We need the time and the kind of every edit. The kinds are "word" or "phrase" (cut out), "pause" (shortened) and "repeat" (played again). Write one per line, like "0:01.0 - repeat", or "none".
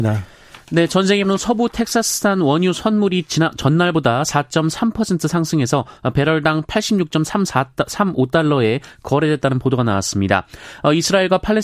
0:01.2 - word